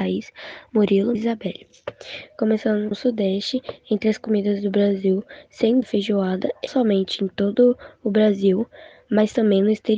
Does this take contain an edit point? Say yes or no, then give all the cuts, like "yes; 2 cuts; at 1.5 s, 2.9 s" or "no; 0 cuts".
yes; 4 cuts; at 1.2 s, 2.9 s, 5.8 s, 6.7 s